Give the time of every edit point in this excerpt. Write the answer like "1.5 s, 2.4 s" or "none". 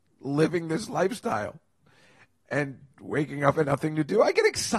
2.9 s, 3.6 s